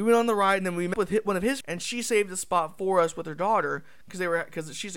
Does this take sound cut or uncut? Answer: cut